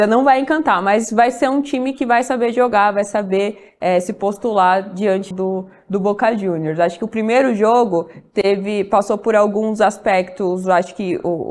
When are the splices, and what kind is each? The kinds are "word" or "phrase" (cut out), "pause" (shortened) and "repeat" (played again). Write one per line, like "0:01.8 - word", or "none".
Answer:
0:05.3 - word

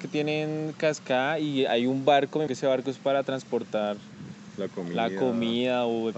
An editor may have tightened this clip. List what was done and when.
0:02.5 - word

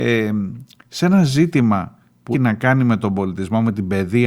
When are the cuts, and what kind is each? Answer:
0:02.3 - word

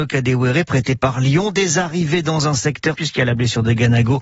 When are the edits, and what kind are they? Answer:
0:02.9 - word

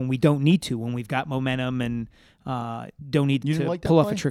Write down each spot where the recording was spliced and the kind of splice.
0:03.4 - word

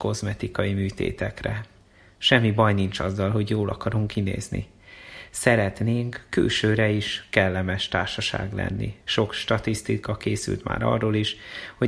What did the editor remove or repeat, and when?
0:01.8 - pause
0:09.0 - pause

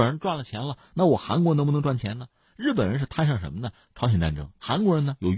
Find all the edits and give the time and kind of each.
none

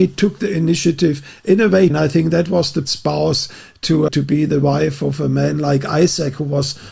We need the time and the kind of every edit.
0:01.9 - phrase
0:02.8 - word
0:04.1 - word

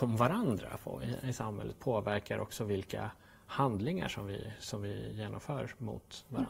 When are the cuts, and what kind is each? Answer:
none

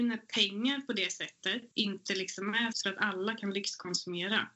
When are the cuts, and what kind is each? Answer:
0:01.7 - pause
0:02.7 - phrase

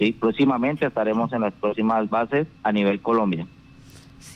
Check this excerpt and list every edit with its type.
0:02.6 - pause

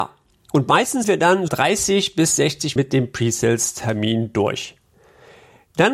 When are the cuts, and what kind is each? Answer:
0:01.0 - word
0:01.5 - phrase
0:02.8 - word

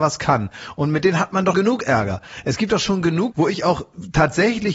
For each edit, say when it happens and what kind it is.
0:01.5 - word
0:03.3 - word

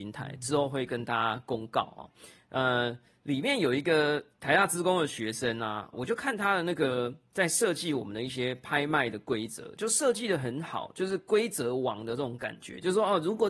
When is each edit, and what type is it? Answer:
0:05.9 - word

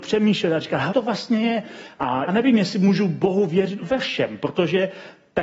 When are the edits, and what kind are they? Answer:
0:00.9 - word
0:02.3 - word
0:03.8 - word

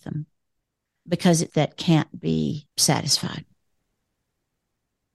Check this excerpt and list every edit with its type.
0:01.5 - phrase
0:02.7 - pause

